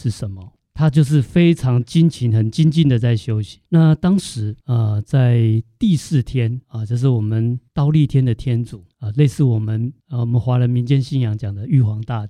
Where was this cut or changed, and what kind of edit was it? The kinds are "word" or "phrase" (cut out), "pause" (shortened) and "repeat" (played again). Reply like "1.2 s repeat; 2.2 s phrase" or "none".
3.7 s pause; 4.6 s pause; 6.6 s pause; 7.7 s pause; 8.9 s pause; 10.0 s pause